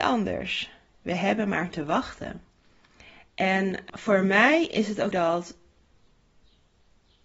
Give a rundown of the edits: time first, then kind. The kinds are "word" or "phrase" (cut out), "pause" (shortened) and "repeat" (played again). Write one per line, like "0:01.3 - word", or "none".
0:03.9 - word
0:05.1 - word

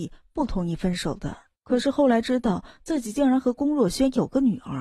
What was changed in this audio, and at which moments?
0:01.5 - pause

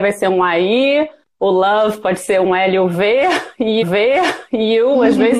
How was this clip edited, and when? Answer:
0:03.8 - repeat

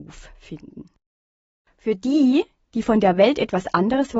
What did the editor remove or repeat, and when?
none

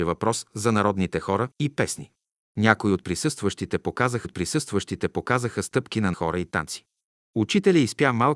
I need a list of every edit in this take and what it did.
0:01.5 - pause
0:04.2 - repeat
0:06.1 - word

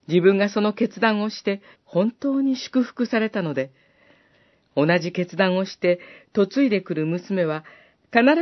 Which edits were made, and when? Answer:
0:01.7 - pause

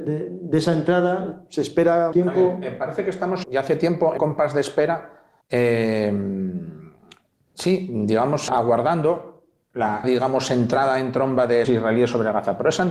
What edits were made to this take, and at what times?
0:02.1 - word
0:03.4 - word
0:04.2 - word
0:05.4 - pause
0:08.5 - word
0:10.0 - word
0:11.6 - phrase

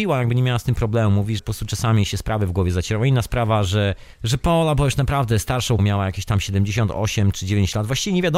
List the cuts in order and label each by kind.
0:01.4 - word
0:04.1 - pause
0:05.8 - word

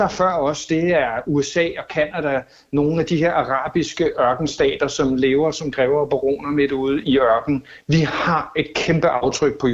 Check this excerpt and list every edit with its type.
0:07.0 - word

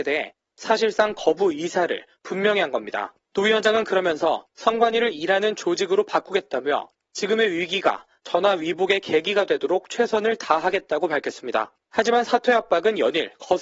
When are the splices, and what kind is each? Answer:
0:03.2 - pause
0:11.8 - pause

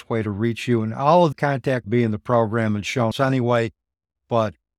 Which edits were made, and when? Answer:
0:01.3 - phrase
0:01.8 - phrase
0:03.1 - word

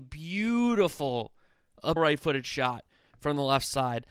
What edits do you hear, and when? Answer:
0:02.0 - word

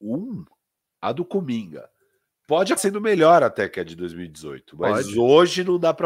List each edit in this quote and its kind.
0:02.8 - word

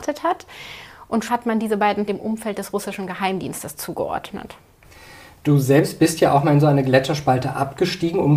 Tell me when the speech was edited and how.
0:01.3 - word
0:02.1 - word

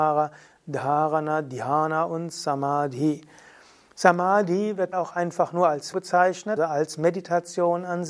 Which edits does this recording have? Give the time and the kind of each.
0:04.9 - word
0:05.9 - word
0:06.6 - word

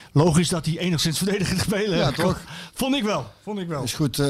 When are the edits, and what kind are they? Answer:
0:01.6 - word

